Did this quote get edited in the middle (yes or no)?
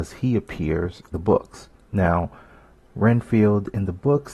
yes